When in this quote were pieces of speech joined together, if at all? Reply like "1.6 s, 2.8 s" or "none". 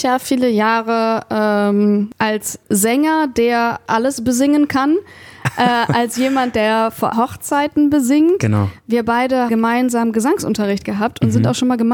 3.9 s, 7.1 s, 9.5 s

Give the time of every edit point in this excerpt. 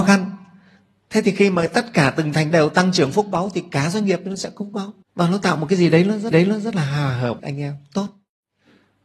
2.5 s, 5.0 s, 6.3 s, 7.4 s

